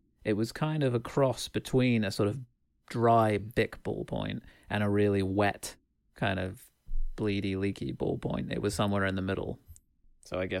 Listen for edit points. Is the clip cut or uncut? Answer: uncut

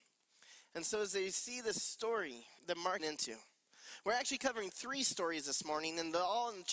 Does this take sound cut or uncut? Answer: cut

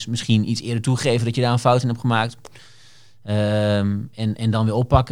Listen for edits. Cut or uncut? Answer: uncut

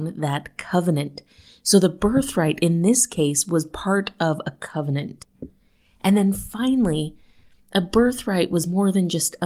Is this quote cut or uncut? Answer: uncut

